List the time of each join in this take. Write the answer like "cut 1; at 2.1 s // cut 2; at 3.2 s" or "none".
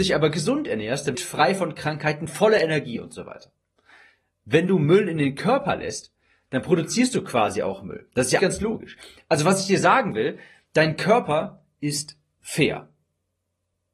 cut 1; at 1.1 s // cut 2; at 8.4 s

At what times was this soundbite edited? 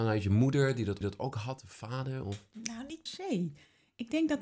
cut 1; at 1.0 s // cut 2; at 3.1 s

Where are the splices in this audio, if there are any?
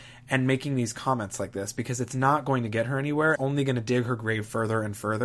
cut 1; at 3.4 s

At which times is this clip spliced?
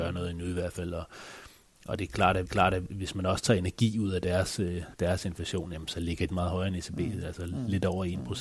cut 1; at 2.4 s // cut 2; at 4.9 s // cut 3; at 6.3 s

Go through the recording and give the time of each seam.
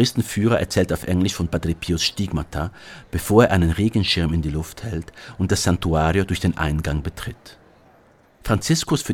none

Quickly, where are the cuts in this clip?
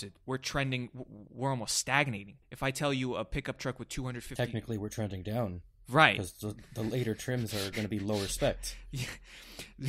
cut 1; at 2.4 s

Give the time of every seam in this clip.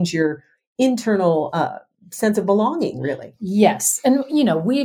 none

